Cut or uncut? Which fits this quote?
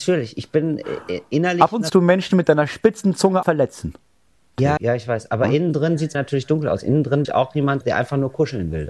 cut